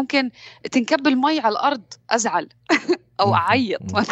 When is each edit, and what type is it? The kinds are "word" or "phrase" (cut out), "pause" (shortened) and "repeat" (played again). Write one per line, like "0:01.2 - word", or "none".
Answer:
none